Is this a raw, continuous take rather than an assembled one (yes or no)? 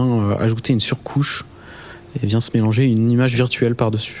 yes